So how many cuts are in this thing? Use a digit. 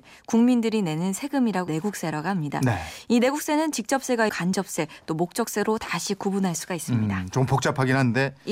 2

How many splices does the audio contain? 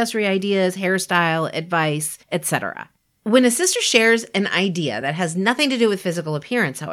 0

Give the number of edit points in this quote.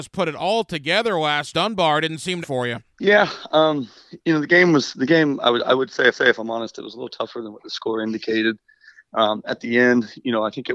4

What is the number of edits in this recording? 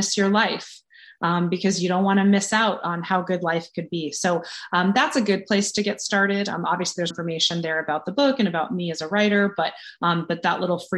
1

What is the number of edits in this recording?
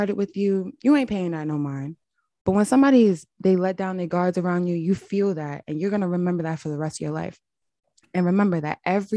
0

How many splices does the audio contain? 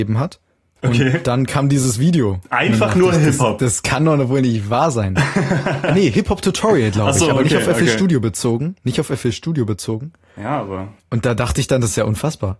0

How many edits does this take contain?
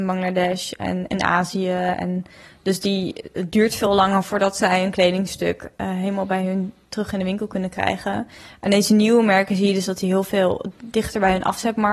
0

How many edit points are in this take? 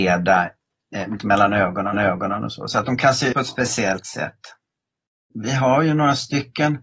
3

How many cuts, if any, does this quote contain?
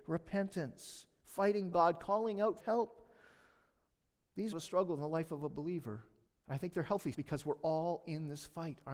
5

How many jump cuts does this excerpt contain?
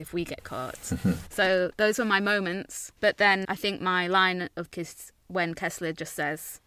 3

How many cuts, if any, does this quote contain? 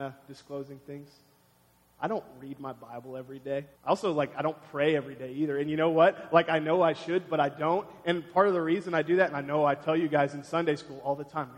1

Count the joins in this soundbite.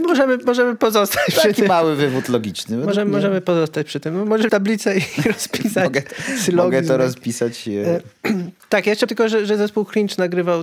2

